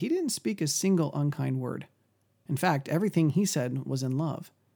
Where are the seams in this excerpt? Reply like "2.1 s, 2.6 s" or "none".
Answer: none